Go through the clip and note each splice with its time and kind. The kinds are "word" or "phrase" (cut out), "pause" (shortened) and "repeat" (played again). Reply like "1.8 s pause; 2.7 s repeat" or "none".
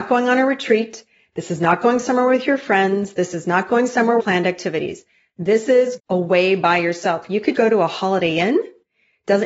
4.2 s phrase; 6.0 s word; 7.5 s word